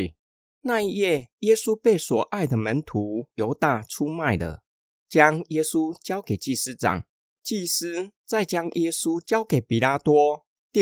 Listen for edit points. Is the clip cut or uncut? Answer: uncut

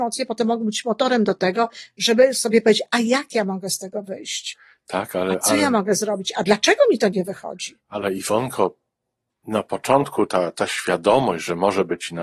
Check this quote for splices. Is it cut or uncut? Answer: uncut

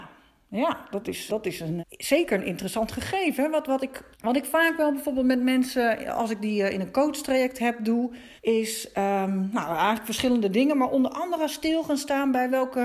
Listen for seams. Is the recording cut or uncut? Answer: cut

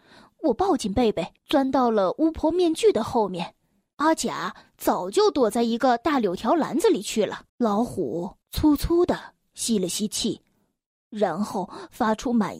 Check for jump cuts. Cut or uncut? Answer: cut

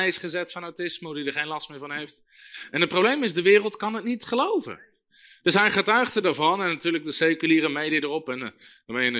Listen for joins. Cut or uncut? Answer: uncut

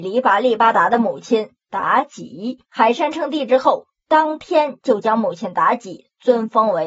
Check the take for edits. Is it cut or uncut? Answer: cut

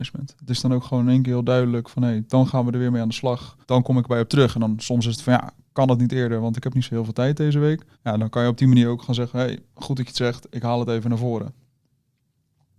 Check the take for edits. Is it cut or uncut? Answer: cut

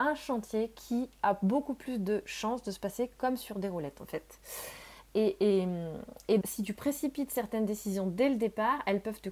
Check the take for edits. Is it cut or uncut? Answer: cut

